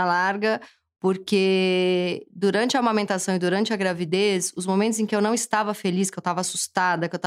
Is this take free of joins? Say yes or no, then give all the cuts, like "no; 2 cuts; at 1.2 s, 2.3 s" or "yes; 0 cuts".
yes; 0 cuts